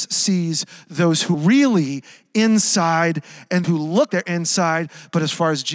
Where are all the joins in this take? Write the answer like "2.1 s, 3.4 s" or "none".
1.3 s, 3.6 s, 4.1 s